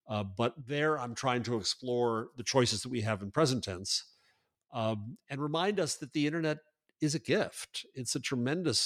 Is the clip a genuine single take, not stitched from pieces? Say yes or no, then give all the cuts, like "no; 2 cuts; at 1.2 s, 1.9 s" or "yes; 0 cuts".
yes; 0 cuts